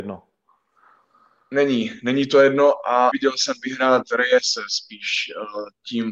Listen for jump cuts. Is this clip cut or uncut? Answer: cut